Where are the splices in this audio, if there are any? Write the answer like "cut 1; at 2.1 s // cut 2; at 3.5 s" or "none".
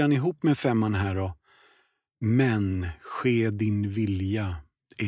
none